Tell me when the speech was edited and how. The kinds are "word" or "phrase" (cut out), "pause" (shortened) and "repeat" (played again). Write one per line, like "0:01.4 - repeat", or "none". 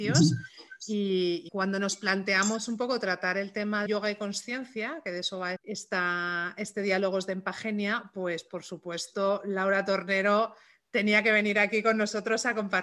0:01.5 - word
0:03.9 - word
0:05.6 - word